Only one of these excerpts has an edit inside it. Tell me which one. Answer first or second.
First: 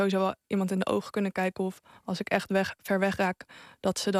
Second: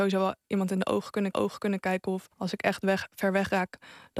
second